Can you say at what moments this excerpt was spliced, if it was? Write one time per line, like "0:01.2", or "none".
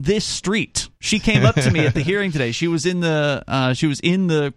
0:01.0